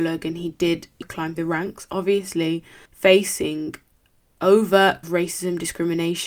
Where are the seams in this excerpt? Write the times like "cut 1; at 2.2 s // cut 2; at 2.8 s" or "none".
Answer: cut 1; at 1.0 s // cut 2; at 1.4 s // cut 3; at 2.9 s // cut 4; at 5.0 s